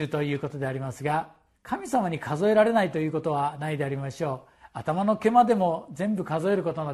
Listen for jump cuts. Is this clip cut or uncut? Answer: cut